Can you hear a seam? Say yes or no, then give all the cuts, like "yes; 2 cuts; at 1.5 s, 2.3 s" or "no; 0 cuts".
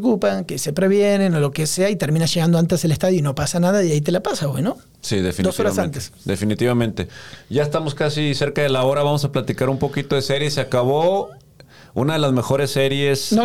no; 0 cuts